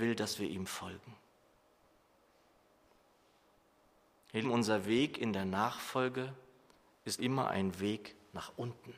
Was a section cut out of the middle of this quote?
yes; 2 cuts; at 4.4 s, 7.2 s

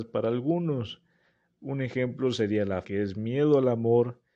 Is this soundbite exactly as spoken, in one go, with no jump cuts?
no; 1 cut; at 2.8 s

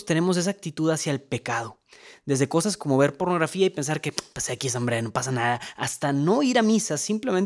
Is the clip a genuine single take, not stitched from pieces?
yes; 0 cuts

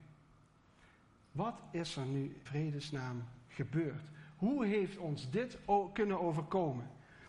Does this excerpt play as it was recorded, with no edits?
no; 1 cut; at 2.5 s

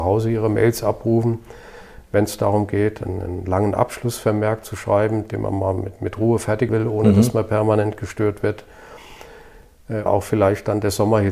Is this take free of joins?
no; 2 cuts; at 6.7 s, 10.1 s

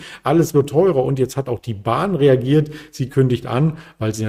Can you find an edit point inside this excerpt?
no; 0 cuts

